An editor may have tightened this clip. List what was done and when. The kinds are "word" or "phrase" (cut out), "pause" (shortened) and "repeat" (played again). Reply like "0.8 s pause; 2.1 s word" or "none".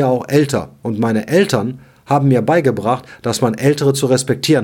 none